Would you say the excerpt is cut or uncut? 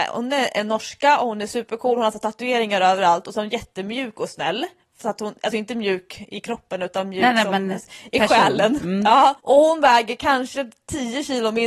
uncut